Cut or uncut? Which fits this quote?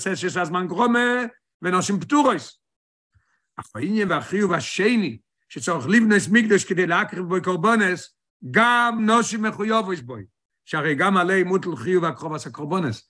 uncut